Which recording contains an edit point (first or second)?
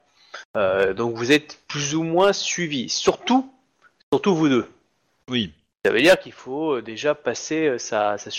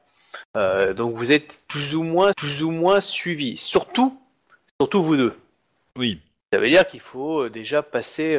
second